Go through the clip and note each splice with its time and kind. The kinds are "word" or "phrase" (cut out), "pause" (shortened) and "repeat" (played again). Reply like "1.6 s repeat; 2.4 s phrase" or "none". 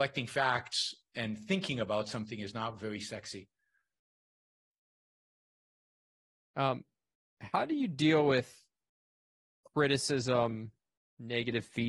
none